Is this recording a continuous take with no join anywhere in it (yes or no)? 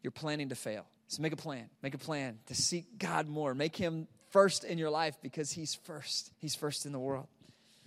no